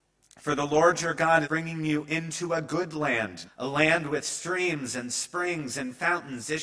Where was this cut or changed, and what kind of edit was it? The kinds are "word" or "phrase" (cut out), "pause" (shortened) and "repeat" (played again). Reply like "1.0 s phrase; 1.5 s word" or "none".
1.4 s word; 3.4 s word